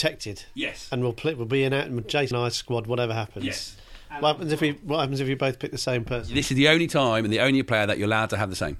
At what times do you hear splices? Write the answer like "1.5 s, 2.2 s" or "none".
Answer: 2.3 s